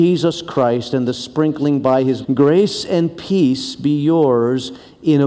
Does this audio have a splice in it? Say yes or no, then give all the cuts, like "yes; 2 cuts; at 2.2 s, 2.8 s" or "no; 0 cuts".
yes; 1 cut; at 2.2 s